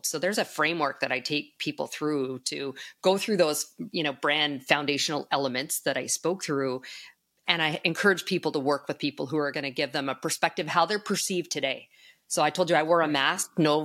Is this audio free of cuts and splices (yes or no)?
yes